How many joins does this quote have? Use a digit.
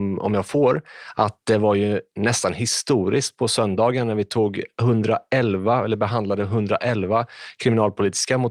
0